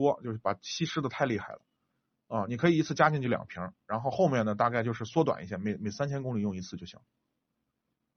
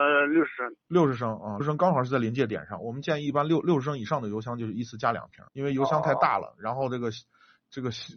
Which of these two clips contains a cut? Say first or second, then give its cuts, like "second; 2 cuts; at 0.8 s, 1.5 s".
second; 2 cuts; at 1.6 s, 5.5 s